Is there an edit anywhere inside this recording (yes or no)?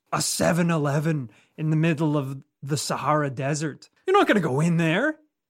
no